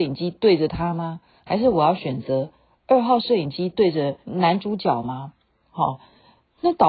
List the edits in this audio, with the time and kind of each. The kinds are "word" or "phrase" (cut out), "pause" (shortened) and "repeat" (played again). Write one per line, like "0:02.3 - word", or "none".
0:04.2 - pause